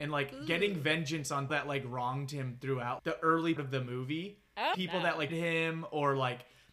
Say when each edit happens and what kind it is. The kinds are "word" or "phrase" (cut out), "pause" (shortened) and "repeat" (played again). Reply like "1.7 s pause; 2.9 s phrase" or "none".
1.5 s word; 3.0 s word; 3.6 s word; 4.7 s word; 5.3 s word